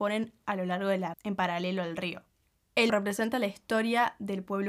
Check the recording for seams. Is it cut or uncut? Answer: cut